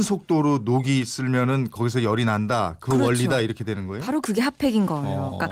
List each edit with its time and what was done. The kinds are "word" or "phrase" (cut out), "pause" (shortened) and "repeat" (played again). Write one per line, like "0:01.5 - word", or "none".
none